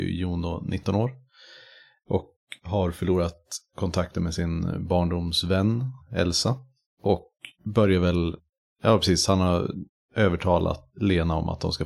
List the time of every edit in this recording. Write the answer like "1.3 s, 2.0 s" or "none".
none